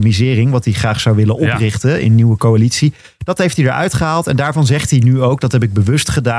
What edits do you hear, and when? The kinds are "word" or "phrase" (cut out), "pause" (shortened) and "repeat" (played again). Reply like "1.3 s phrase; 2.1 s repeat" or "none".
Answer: none